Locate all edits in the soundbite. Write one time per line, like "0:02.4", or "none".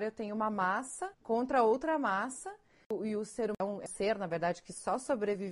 0:01.1
0:03.9